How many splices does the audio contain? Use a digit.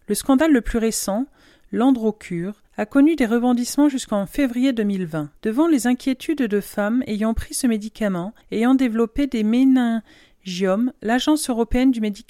3